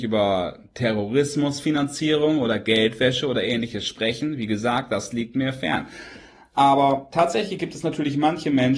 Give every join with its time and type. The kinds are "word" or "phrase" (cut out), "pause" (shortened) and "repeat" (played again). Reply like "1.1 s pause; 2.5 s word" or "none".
none